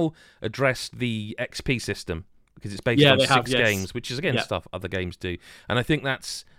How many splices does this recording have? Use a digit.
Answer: 0